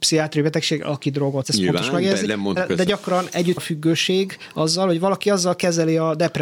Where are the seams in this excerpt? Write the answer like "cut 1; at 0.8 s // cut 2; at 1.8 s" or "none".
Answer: cut 1; at 1.4 s // cut 2; at 2.6 s // cut 3; at 3.6 s

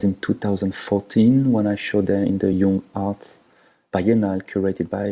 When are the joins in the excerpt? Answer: none

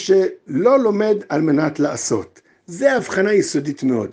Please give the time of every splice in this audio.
none

